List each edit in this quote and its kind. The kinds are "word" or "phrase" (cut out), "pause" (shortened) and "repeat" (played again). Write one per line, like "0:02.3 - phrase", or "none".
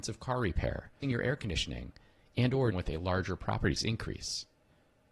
0:01.0 - word
0:02.7 - word
0:03.8 - word